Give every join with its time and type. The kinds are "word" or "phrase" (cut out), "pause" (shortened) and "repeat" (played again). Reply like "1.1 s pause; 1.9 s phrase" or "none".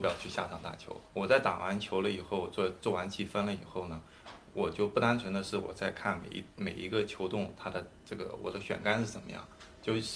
1.1 s pause